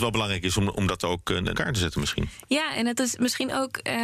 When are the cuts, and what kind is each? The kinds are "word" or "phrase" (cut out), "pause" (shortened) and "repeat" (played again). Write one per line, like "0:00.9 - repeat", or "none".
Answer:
0:01.5 - word

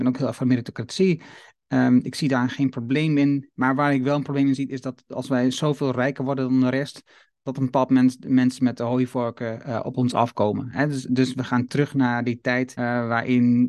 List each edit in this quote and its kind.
0:12.8 - word

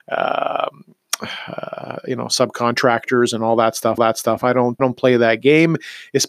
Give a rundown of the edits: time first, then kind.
0:04.0 - repeat
0:04.8 - word

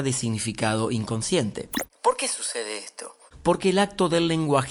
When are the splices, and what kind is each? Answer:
none

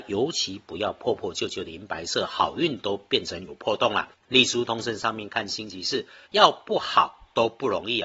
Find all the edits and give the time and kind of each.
0:04.1 - pause
0:06.2 - pause

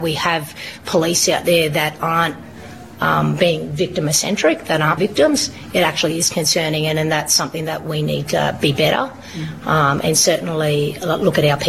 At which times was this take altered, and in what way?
0:05.0 - phrase

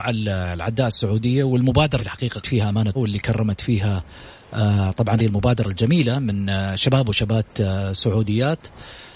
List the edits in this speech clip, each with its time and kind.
0:02.0 - word
0:02.4 - word
0:02.9 - phrase
0:05.2 - word

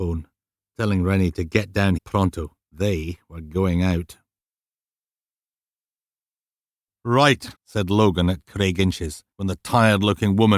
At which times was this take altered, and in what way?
0:02.0 - word
0:02.6 - pause
0:07.5 - pause
0:09.3 - pause

